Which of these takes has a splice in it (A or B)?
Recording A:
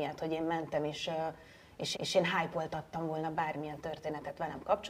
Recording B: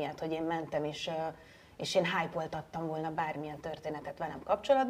A